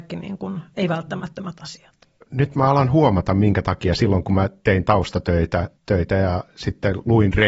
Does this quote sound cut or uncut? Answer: cut